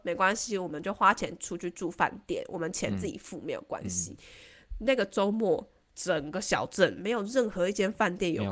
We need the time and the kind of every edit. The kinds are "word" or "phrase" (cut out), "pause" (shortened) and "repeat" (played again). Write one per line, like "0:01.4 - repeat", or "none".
none